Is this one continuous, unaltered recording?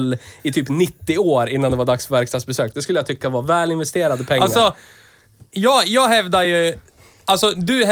yes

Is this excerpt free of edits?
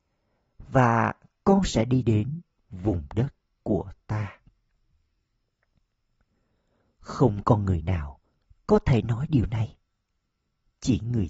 yes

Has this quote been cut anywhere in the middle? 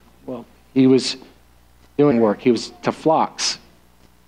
yes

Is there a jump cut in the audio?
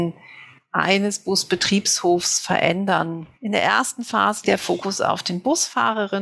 yes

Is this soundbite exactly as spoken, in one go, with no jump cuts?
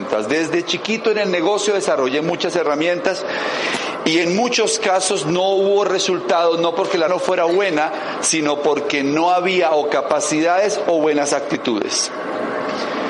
no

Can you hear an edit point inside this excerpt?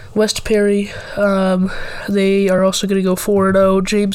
no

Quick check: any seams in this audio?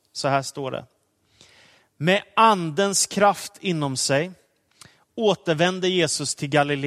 no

